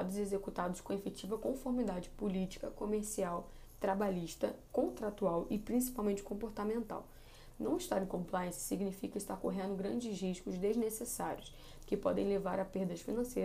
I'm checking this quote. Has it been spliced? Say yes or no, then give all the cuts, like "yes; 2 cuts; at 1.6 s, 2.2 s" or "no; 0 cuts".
no; 0 cuts